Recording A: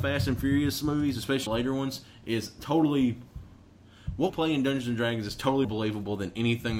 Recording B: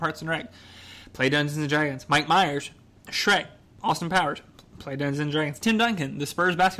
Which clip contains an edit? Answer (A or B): A